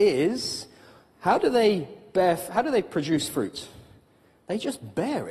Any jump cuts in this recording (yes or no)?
no